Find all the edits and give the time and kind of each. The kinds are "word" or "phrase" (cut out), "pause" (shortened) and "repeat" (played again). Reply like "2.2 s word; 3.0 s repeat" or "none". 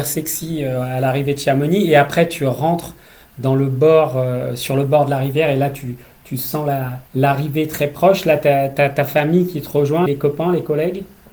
7.1 s pause; 10.1 s word

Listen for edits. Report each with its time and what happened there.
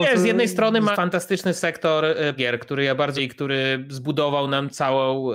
0.9 s word; 2.4 s word; 3.2 s word

